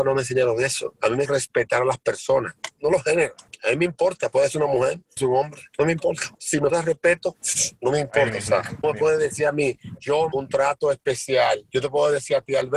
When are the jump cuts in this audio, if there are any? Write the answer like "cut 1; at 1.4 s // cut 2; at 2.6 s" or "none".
cut 1; at 1.3 s // cut 2; at 5.2 s // cut 3; at 6.7 s // cut 4; at 8.8 s // cut 5; at 10.3 s

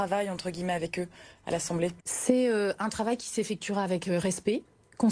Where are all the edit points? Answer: cut 1; at 2.0 s

